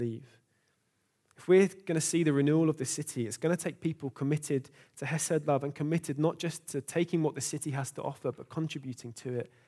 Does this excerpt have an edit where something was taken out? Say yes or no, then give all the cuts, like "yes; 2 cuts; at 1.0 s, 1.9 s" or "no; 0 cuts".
no; 0 cuts